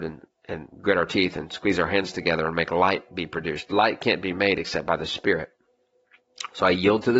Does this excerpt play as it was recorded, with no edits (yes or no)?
yes